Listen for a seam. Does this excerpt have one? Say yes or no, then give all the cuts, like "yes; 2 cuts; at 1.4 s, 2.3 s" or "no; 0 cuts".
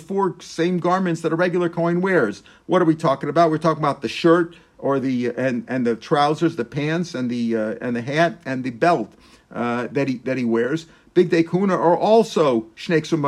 no; 0 cuts